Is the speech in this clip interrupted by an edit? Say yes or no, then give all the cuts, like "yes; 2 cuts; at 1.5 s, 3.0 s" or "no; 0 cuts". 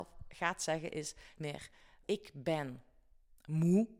yes; 2 cuts; at 1.4 s, 2.0 s